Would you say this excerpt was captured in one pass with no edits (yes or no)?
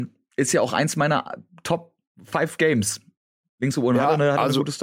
yes